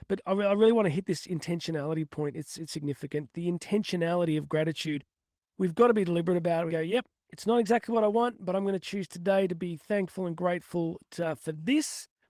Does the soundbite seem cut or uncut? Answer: cut